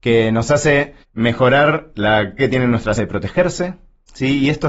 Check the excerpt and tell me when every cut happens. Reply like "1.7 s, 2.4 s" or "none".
1.0 s, 2.4 s, 3.0 s